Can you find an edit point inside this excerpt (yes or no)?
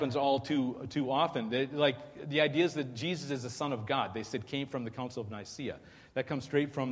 no